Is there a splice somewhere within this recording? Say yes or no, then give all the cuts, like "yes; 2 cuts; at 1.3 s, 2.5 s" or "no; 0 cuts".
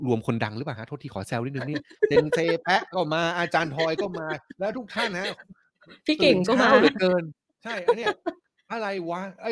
no; 0 cuts